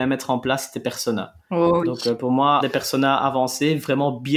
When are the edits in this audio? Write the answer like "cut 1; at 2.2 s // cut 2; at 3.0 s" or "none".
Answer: cut 1; at 2.6 s